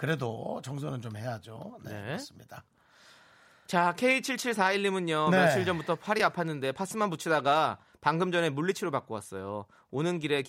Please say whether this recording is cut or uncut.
uncut